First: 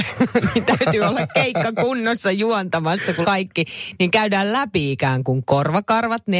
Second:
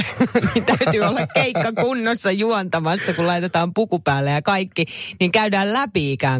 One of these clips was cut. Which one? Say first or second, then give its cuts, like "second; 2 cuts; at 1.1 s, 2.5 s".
first; 1 cut; at 3.2 s